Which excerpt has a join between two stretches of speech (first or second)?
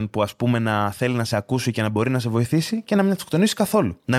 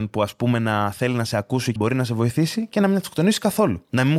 second